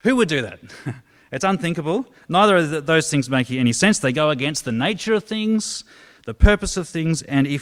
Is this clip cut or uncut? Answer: uncut